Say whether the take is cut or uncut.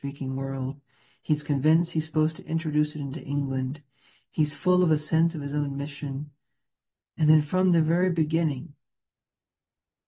uncut